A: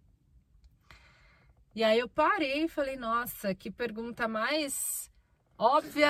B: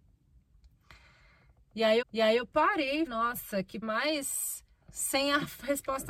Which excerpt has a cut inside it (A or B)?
B